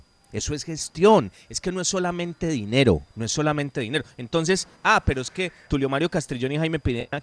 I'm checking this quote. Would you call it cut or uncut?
cut